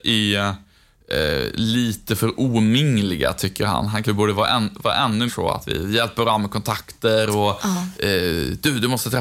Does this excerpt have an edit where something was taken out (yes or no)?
yes